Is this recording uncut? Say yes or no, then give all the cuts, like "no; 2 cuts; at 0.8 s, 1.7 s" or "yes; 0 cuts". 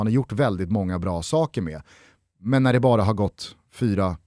yes; 0 cuts